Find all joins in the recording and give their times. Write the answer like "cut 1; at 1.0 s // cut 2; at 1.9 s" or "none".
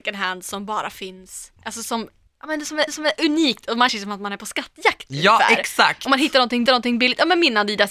cut 1; at 1.6 s // cut 2; at 2.3 s // cut 3; at 2.9 s // cut 4; at 3.9 s // cut 5; at 6.7 s